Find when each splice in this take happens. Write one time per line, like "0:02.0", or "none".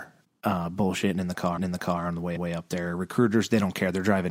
0:01.6
0:02.4